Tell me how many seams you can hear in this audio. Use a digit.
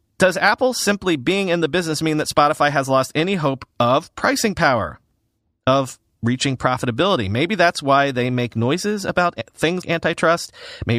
1